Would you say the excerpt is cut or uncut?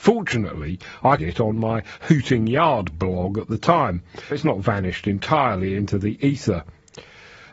cut